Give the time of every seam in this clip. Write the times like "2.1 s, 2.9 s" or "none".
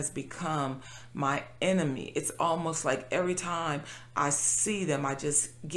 none